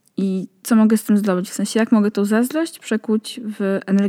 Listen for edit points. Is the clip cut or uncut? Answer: uncut